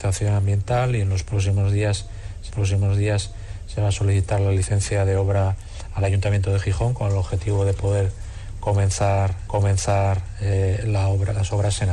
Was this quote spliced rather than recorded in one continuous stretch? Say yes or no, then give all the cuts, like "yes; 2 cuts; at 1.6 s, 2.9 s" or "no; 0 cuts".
yes; 2 cuts; at 2.5 s, 9.5 s